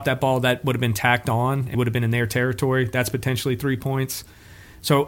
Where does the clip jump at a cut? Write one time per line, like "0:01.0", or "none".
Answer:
0:01.7

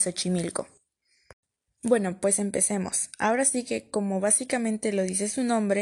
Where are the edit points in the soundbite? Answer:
none

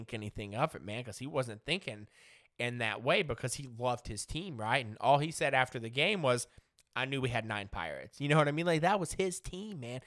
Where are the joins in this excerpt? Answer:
none

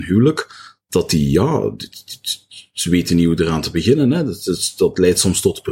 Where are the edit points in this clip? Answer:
none

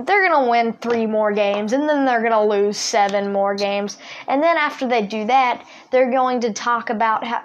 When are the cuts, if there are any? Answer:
none

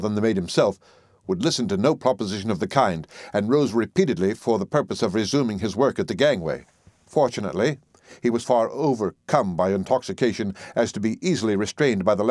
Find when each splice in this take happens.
0:06.9
0:08.4

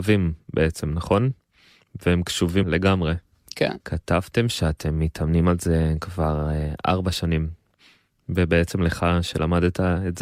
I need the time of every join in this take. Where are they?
0:02.6
0:03.8

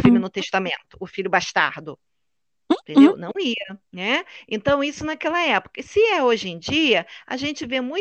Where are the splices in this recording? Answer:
0:03.8

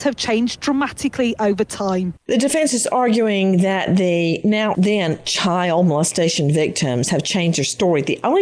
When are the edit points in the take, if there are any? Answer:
0:02.2
0:04.7

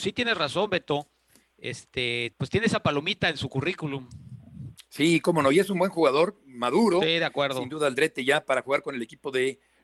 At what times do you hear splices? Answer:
0:02.3

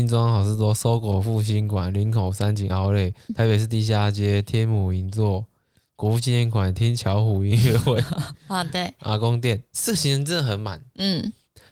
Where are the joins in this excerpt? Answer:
0:03.3
0:09.7

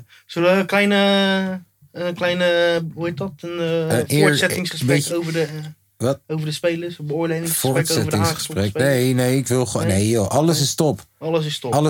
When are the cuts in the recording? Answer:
none

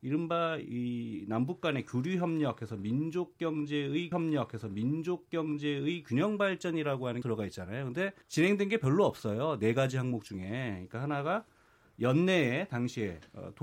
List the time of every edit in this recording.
0:04.1
0:07.2
0:08.2

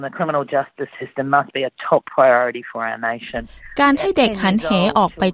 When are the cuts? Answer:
none

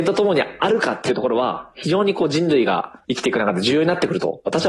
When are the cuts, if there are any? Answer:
0:03.0

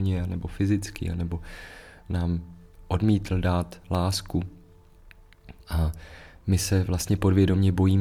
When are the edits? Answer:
0:05.6

